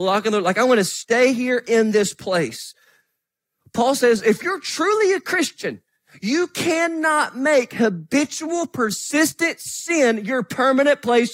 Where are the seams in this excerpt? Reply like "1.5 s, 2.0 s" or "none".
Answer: none